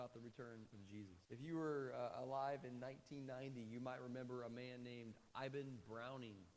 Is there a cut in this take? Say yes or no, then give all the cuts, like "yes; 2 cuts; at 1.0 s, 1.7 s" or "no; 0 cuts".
yes; 1 cut; at 1.2 s